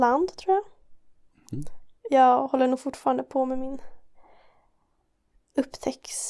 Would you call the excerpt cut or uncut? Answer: uncut